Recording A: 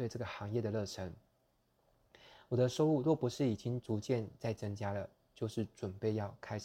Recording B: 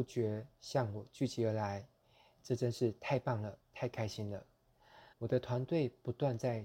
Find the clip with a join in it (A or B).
B